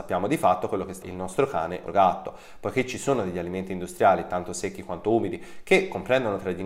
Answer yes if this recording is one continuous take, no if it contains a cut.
no